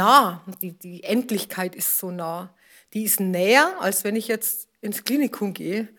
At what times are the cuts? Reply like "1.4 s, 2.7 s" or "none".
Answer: none